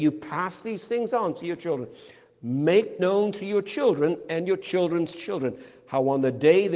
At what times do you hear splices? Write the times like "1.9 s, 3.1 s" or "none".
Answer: 3.0 s